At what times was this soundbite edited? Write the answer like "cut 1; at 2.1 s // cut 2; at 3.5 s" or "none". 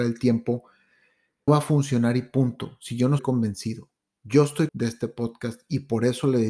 cut 1; at 1.5 s // cut 2; at 3.2 s // cut 3; at 4.7 s

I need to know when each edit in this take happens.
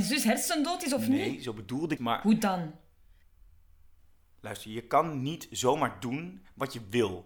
cut 1; at 2.0 s

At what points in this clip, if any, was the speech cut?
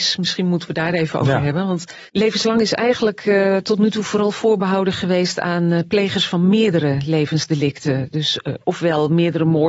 cut 1; at 2.1 s

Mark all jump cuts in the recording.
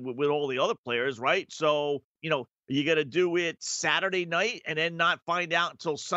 cut 1; at 2.2 s

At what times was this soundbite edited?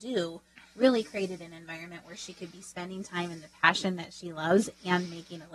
none

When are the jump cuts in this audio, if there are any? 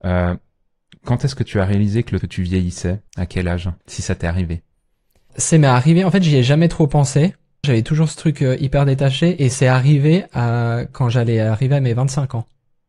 cut 1; at 2.2 s // cut 2; at 3.1 s // cut 3; at 3.8 s // cut 4; at 5.3 s // cut 5; at 7.6 s

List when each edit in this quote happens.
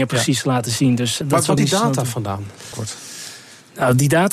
cut 1; at 1.2 s // cut 2; at 1.6 s // cut 3; at 2.7 s

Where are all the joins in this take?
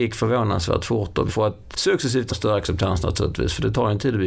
cut 1; at 1.3 s // cut 2; at 1.7 s // cut 3; at 2.3 s

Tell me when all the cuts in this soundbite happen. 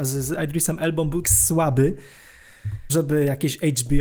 cut 1; at 1.2 s // cut 2; at 2.9 s

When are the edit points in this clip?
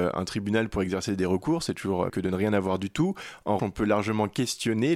cut 1; at 2.1 s // cut 2; at 3.6 s

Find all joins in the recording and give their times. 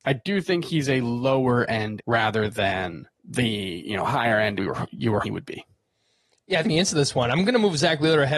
cut 1; at 2.0 s // cut 2; at 3.2 s // cut 3; at 4.6 s // cut 4; at 5.2 s // cut 5; at 6.6 s

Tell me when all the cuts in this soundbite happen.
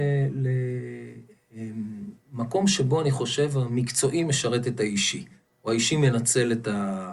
none

